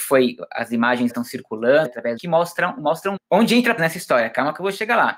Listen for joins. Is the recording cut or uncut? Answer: cut